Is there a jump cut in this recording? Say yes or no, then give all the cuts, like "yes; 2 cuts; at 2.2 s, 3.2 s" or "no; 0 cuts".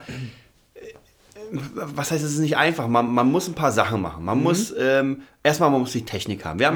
no; 0 cuts